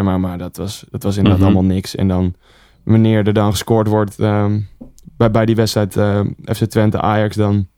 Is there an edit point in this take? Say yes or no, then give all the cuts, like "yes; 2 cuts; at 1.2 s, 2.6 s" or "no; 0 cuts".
no; 0 cuts